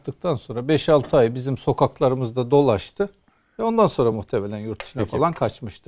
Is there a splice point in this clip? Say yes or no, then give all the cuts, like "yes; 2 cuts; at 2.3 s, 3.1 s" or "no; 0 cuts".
no; 0 cuts